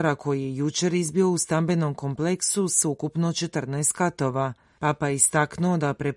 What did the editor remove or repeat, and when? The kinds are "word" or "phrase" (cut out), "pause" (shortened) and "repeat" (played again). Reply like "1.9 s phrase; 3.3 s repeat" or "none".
none